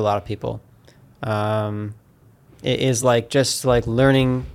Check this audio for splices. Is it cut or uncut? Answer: uncut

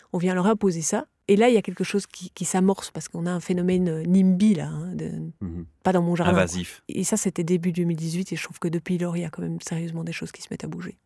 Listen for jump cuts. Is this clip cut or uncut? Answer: uncut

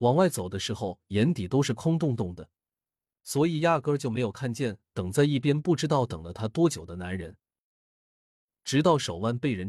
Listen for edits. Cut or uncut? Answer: uncut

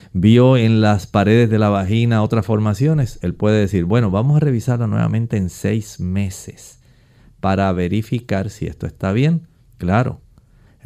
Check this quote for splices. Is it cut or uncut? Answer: uncut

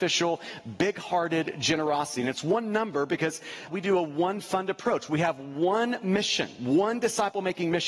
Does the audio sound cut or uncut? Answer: cut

